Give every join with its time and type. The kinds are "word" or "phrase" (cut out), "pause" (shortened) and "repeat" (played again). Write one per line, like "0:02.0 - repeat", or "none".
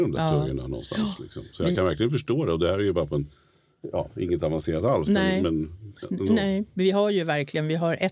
none